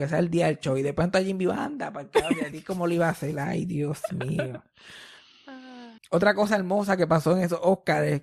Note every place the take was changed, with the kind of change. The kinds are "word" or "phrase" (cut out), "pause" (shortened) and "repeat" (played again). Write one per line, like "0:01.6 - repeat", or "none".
0:06.0 - pause